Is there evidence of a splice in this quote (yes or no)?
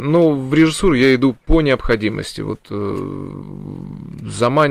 no